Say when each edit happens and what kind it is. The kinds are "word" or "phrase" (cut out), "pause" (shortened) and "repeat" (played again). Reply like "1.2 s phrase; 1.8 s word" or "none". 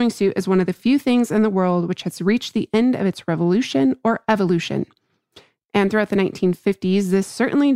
none